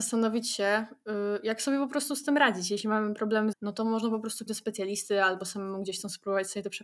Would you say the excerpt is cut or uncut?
cut